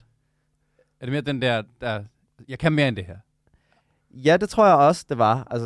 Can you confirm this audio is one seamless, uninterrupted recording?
yes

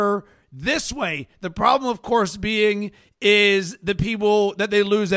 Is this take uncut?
yes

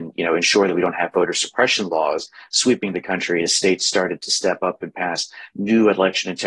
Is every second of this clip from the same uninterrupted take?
yes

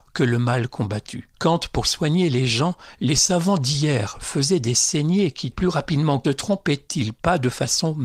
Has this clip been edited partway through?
yes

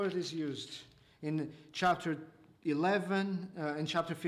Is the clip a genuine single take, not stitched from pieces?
yes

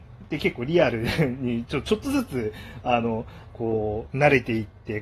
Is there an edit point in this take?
yes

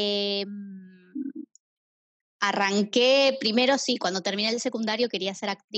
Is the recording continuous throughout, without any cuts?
yes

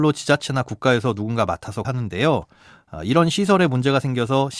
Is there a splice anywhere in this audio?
yes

